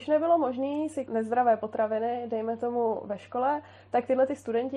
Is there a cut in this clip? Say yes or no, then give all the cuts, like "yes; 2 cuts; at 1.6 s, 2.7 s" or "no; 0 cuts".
yes; 1 cut; at 1.1 s